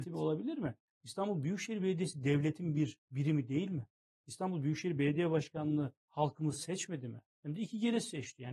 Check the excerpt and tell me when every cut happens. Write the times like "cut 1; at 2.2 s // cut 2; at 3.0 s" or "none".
cut 1; at 3.0 s // cut 2; at 4.1 s // cut 3; at 6.0 s // cut 4; at 7.3 s